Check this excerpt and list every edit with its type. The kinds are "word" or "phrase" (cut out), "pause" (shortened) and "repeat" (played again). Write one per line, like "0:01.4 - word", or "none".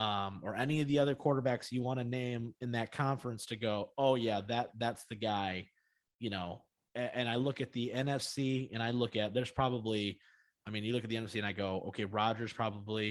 none